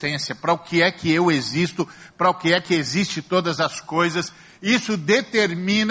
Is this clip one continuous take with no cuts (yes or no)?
yes